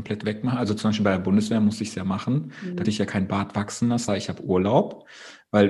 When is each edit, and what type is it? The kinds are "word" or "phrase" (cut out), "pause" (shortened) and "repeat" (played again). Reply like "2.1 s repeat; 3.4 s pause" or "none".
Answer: 2.8 s word; 4.1 s word